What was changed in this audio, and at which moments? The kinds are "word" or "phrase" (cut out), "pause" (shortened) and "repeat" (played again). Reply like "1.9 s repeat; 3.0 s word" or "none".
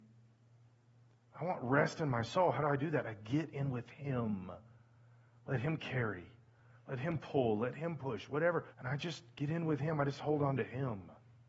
8.7 s pause